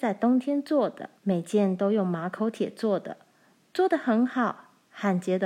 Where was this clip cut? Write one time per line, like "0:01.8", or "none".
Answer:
0:01.2